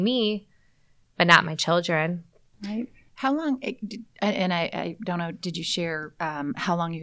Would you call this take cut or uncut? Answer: uncut